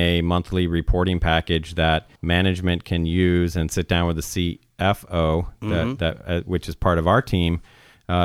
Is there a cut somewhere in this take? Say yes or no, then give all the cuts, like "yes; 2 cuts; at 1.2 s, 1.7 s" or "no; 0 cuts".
yes; 1 cut; at 2.2 s